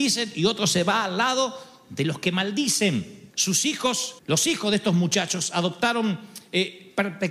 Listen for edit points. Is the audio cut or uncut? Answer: cut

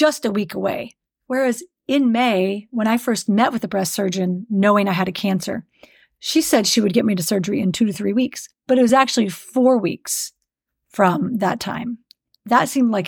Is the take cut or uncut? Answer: uncut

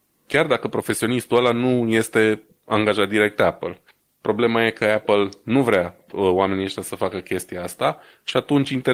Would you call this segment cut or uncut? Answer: cut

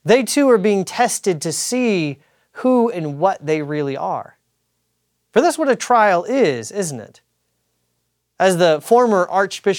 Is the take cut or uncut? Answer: uncut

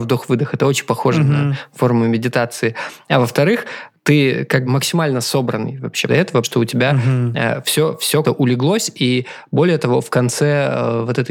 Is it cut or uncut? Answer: cut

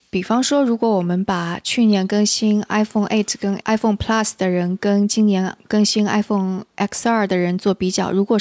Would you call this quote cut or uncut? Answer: uncut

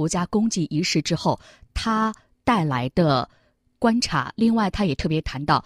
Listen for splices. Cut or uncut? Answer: uncut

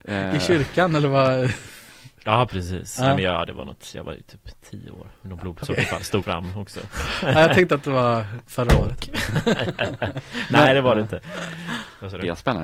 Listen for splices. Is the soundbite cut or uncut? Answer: cut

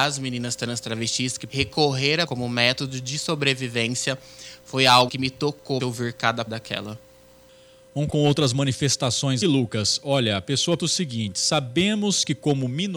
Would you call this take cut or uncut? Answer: cut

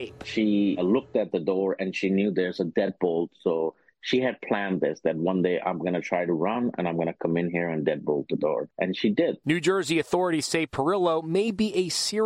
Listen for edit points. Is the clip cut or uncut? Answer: uncut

